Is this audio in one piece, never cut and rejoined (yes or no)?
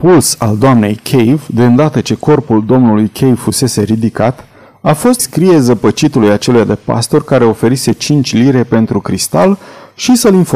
no